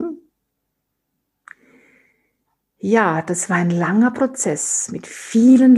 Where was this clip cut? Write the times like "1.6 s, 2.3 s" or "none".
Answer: none